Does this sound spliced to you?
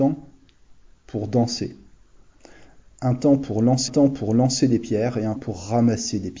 yes; 2 cuts; at 3.9 s, 5.4 s

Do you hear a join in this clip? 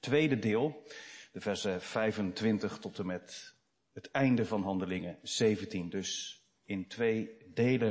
no; 0 cuts

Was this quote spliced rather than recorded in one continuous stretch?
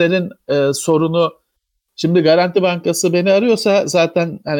no; 0 cuts

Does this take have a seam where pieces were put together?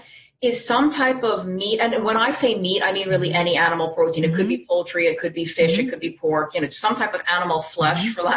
no; 0 cuts

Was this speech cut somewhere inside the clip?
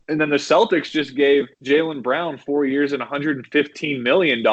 yes; 1 cut; at 1.5 s

